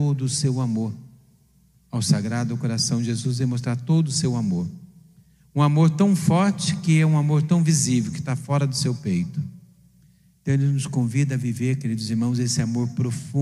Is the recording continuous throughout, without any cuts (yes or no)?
yes